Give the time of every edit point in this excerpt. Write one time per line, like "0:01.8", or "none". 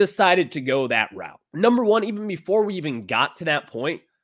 0:01.5